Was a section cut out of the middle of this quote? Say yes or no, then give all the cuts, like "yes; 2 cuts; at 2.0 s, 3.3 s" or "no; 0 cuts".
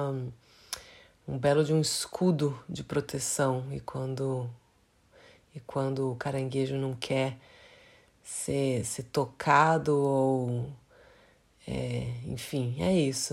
no; 0 cuts